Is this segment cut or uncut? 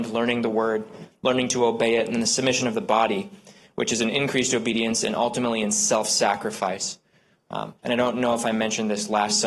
cut